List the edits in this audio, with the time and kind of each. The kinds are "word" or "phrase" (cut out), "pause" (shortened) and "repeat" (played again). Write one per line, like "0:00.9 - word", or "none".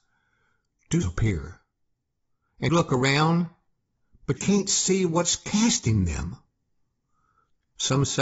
0:01.0 - word
0:02.7 - word
0:04.4 - word